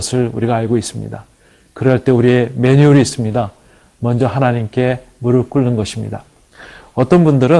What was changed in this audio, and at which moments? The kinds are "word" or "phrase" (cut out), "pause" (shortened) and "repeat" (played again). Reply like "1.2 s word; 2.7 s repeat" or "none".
none